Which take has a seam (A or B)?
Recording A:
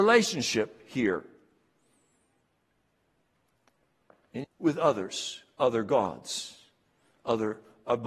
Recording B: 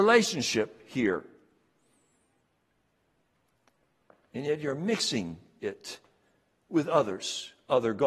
A